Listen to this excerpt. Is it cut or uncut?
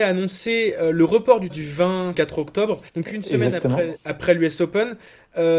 cut